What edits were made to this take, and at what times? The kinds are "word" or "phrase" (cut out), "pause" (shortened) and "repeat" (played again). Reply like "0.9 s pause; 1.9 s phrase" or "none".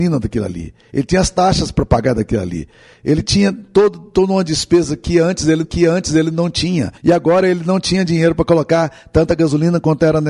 5.6 s repeat; 7.0 s pause